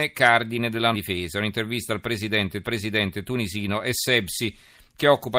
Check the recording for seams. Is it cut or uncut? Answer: cut